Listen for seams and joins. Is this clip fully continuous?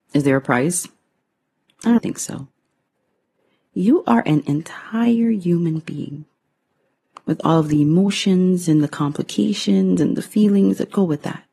no; 1 cut; at 2.0 s

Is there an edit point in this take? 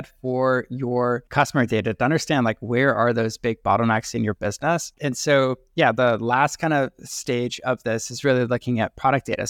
no; 0 cuts

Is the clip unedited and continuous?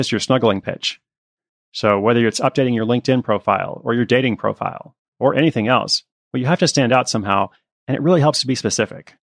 yes; 0 cuts

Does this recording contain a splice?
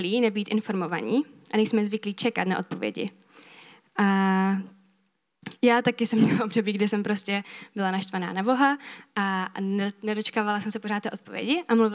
no; 0 cuts

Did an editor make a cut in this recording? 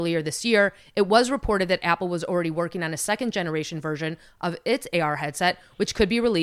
no; 0 cuts

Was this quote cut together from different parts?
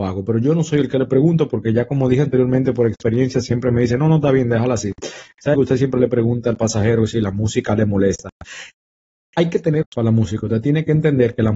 yes; 2 cuts; at 5.5 s, 9.8 s

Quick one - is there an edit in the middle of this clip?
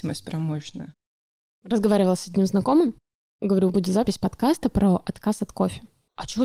yes; 1 cut; at 3.7 s

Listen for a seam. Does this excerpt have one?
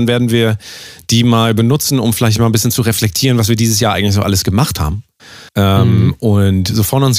yes; 1 cut; at 5.5 s

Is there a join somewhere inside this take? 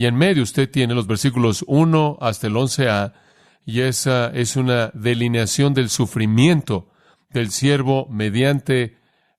no; 0 cuts

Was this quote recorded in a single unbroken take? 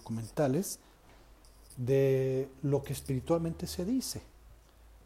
yes; 0 cuts

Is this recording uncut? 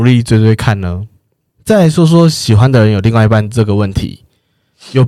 yes; 0 cuts

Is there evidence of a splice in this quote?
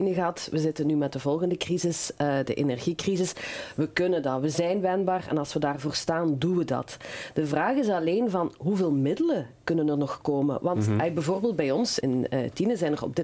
yes; 1 cut; at 12.0 s

